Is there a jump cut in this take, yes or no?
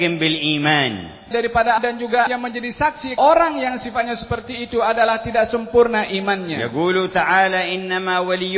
yes